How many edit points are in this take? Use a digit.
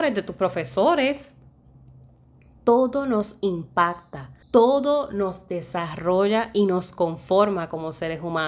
1